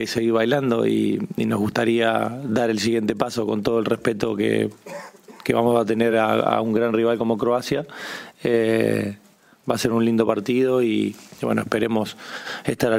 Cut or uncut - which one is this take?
uncut